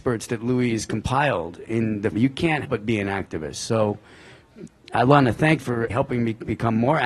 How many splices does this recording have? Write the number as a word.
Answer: four